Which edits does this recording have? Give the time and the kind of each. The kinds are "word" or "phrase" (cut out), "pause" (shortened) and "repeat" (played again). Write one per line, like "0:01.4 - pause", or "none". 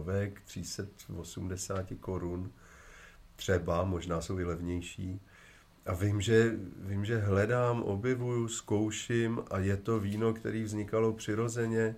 none